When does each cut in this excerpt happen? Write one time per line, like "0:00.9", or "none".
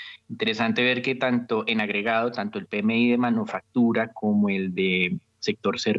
none